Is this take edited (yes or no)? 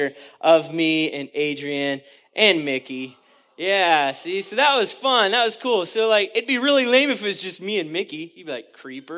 no